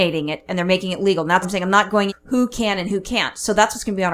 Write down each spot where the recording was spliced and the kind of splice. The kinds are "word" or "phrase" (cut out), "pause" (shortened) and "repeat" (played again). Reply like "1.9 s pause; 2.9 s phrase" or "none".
1.4 s word; 2.1 s word